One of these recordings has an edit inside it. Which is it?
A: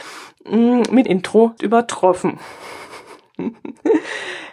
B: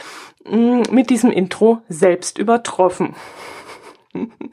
A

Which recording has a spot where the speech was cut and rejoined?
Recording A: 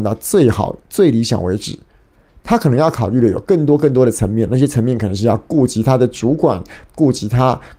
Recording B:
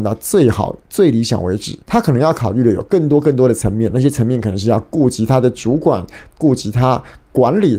B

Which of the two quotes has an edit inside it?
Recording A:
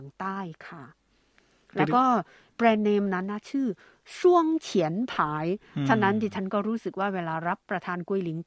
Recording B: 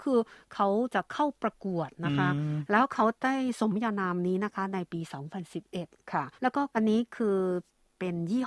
B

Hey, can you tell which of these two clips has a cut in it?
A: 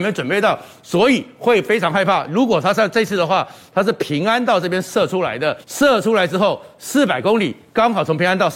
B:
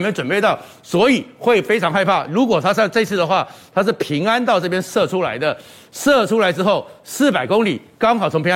A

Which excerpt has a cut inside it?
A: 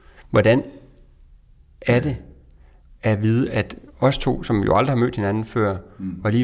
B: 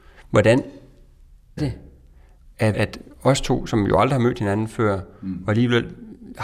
B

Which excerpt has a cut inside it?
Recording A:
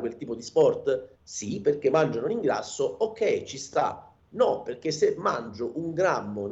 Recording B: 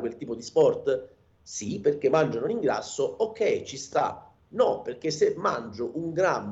A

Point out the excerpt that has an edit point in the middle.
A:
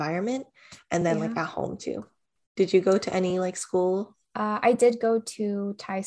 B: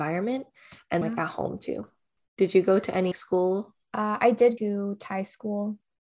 B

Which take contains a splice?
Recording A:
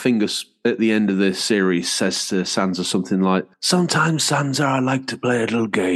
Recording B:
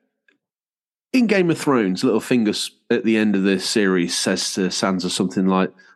A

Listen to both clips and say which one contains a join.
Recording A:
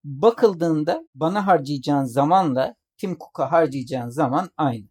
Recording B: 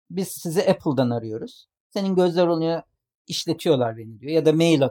A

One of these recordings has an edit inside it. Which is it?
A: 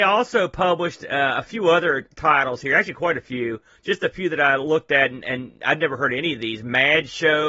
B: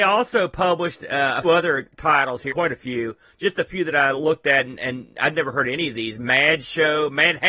B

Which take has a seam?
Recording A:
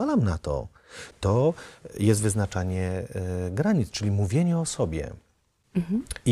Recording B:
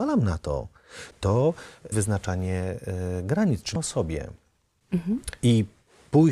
B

